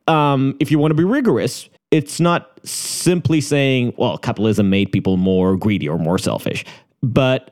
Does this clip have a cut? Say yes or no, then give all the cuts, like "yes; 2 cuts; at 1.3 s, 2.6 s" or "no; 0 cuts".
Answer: yes; 1 cut; at 1.8 s